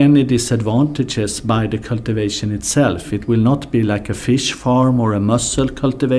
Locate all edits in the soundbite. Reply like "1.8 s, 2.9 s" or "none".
none